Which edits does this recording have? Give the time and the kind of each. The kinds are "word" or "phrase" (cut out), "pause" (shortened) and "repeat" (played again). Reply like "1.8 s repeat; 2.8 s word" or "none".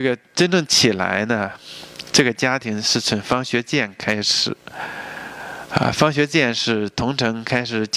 none